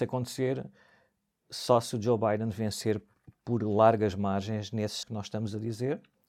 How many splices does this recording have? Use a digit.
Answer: 1